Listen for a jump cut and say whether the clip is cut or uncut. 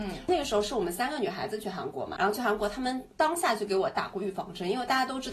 cut